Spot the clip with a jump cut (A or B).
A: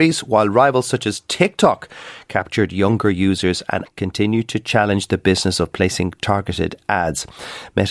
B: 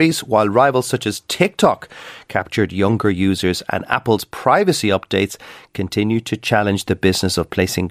A